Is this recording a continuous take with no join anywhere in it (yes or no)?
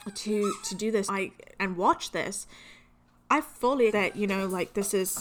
no